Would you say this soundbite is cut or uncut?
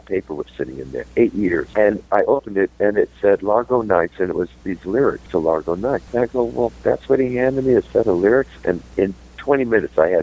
uncut